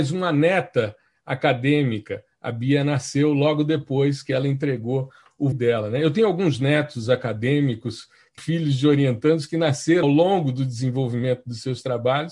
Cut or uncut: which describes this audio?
cut